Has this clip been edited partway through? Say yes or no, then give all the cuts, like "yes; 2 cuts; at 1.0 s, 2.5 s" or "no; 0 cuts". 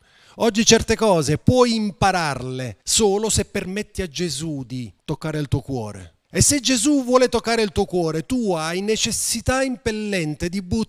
yes; 3 cuts; at 2.8 s, 5.0 s, 6.2 s